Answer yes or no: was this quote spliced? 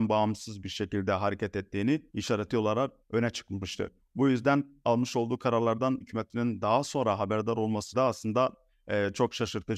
yes